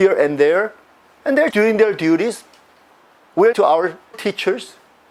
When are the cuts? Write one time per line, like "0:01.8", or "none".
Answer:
0:01.5
0:03.5
0:04.1